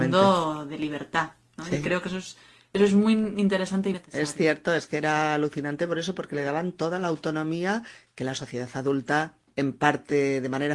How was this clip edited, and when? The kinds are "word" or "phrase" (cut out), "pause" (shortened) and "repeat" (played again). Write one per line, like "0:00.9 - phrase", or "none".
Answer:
0:03.9 - word